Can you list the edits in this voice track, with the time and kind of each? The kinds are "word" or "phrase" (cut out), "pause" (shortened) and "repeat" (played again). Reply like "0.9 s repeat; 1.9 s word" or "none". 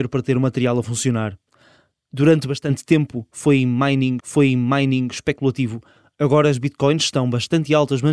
4.2 s repeat